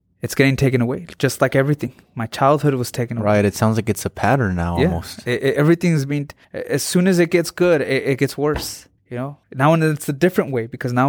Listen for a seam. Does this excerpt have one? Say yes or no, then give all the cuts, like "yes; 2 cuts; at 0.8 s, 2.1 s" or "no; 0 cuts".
yes; 3 cuts; at 6.4 s, 9.0 s, 9.4 s